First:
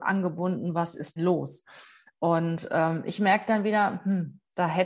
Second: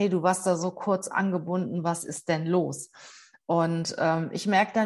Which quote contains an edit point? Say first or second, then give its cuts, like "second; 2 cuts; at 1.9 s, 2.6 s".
first; 1 cut; at 1.2 s